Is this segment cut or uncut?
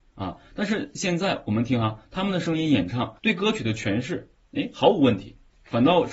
cut